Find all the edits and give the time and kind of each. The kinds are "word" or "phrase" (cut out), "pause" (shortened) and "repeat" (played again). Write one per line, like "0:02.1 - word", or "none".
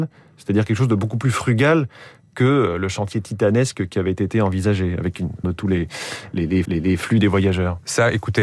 0:03.1 - word
0:05.4 - word
0:06.6 - repeat